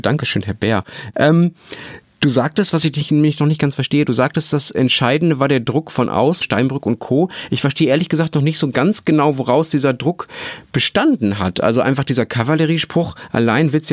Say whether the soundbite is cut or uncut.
cut